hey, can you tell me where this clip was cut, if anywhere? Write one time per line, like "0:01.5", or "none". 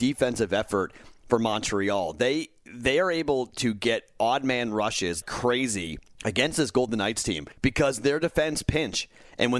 0:05.2